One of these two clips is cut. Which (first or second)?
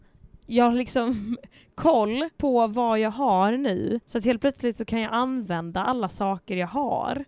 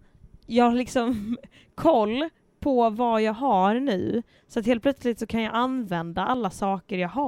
first